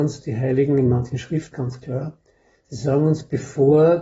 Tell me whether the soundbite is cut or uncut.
cut